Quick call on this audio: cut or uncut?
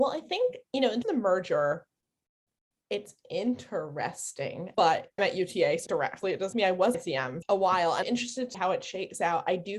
cut